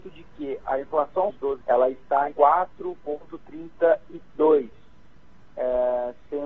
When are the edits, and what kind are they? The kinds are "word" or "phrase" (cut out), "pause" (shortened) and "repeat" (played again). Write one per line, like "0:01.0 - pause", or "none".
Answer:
0:01.3 - word
0:01.6 - word
0:02.3 - word